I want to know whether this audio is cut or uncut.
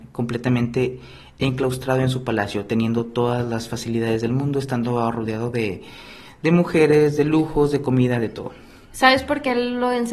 uncut